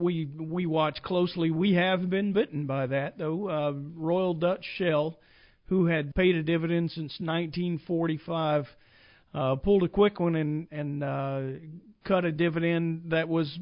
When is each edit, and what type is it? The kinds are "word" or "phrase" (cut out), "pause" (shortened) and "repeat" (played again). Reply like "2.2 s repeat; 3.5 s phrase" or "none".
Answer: 6.1 s word

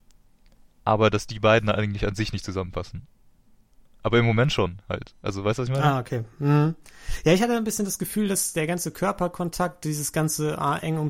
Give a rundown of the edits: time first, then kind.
8.5 s word

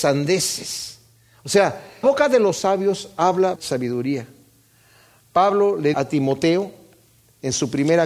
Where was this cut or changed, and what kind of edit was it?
2.0 s word; 3.6 s word; 5.9 s word

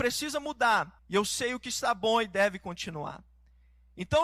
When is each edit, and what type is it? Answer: 1.0 s pause

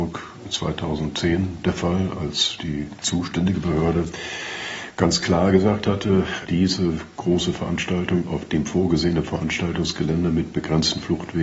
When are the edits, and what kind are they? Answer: none

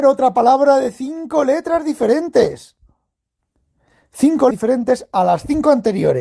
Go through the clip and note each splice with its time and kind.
4.5 s word

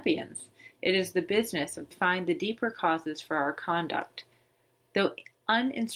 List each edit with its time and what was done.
1.9 s phrase

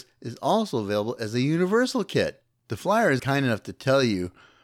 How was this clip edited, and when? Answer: 3.2 s word

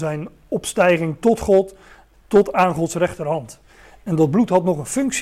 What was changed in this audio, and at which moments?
none

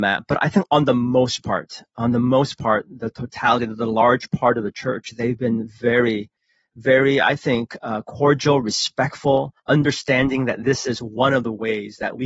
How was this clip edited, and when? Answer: 9.6 s pause

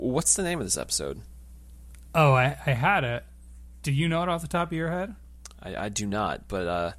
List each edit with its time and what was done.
none

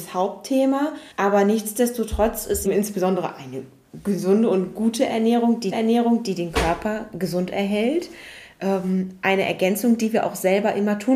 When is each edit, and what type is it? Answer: 1.1 s pause; 2.7 s phrase; 5.7 s repeat

